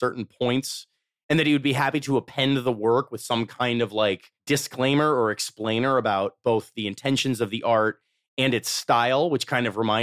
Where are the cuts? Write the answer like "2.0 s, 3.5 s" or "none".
4.4 s